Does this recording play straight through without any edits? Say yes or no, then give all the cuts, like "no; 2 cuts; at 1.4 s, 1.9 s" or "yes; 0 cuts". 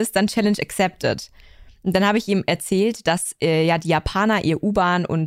yes; 0 cuts